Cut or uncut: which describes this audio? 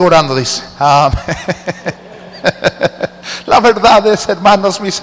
uncut